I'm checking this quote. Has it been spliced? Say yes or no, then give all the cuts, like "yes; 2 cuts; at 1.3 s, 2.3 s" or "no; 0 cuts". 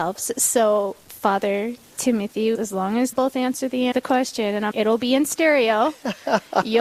yes; 5 cuts; at 1.1 s, 2.5 s, 3.1 s, 3.9 s, 4.7 s